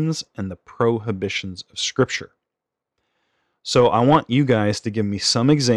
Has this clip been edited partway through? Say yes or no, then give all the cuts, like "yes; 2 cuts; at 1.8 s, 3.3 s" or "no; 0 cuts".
no; 0 cuts